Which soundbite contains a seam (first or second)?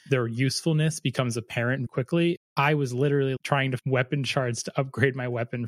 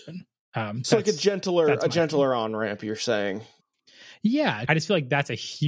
first